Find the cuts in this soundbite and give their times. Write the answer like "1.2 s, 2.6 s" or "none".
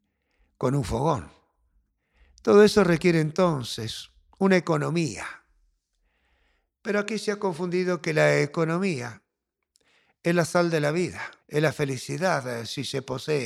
11.4 s